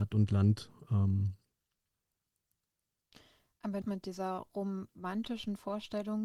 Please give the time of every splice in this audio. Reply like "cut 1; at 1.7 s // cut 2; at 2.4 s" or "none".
cut 1; at 3.8 s